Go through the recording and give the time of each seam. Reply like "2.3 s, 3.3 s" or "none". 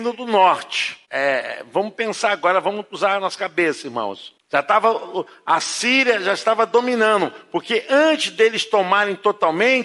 none